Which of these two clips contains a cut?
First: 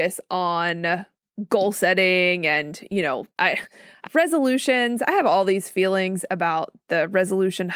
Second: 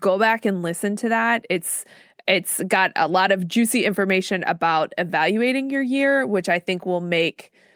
first; 2 cuts; at 3.3 s, 4.0 s

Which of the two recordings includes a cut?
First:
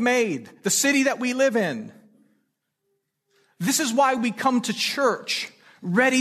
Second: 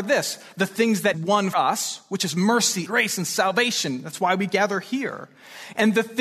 second; 3 cuts; at 1.1 s, 1.5 s, 2.9 s

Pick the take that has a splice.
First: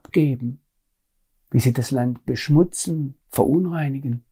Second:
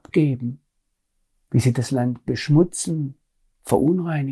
first; 1 cut; at 3.2 s

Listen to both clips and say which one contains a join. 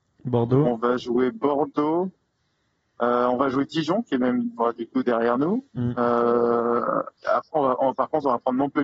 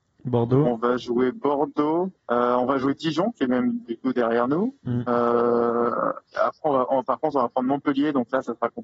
second; 2 cuts; at 2.2 s, 3.8 s

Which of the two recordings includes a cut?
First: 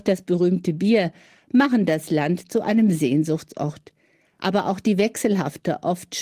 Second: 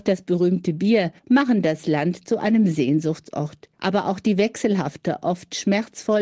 second; 2 cuts; at 1.2 s, 3.7 s

